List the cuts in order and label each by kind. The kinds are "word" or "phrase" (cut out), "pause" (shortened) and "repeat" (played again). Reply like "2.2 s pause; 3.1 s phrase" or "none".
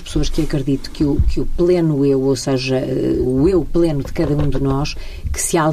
none